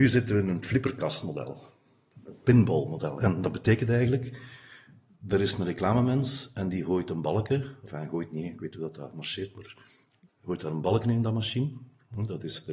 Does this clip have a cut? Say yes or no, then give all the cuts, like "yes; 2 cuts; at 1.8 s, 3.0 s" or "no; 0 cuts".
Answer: no; 0 cuts